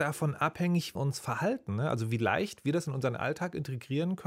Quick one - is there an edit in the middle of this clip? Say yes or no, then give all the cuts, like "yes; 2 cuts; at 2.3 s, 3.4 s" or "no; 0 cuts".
yes; 1 cut; at 1.0 s